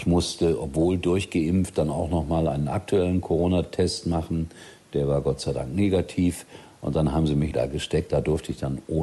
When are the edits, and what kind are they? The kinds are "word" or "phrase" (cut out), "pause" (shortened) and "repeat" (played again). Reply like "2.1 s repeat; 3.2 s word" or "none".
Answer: 7.5 s phrase; 8.1 s word